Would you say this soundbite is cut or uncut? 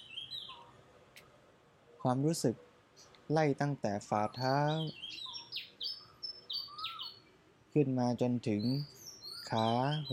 uncut